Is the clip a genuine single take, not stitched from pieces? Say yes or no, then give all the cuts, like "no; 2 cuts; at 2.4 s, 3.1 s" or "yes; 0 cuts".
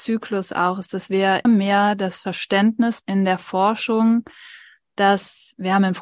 no; 2 cuts; at 1.4 s, 3.0 s